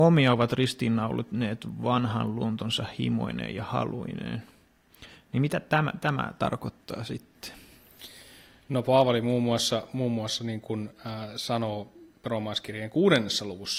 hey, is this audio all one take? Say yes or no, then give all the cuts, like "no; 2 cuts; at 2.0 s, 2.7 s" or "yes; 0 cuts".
yes; 0 cuts